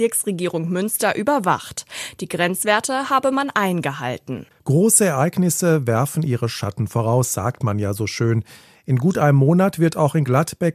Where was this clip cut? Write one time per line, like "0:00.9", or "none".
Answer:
0:04.5